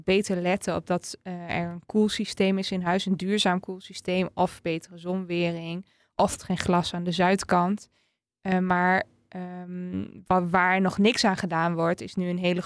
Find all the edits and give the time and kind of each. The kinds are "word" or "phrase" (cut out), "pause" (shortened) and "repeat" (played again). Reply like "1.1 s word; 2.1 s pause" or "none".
6.4 s word